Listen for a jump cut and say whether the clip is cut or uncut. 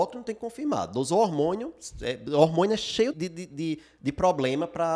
cut